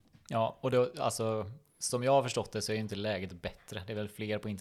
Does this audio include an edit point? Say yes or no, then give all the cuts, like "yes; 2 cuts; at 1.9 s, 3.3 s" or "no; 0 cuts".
no; 0 cuts